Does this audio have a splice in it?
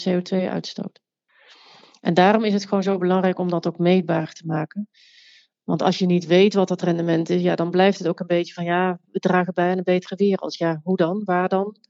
no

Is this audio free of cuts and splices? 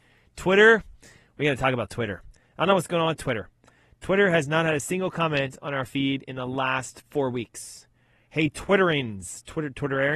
yes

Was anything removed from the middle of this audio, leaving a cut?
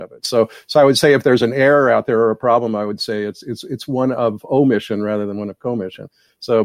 no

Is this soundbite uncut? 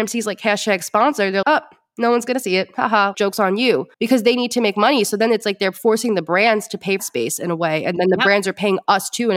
no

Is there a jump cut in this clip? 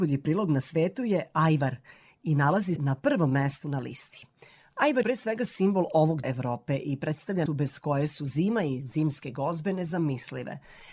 yes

